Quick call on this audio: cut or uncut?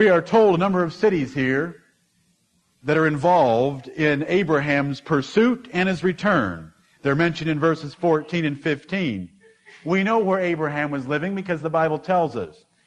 uncut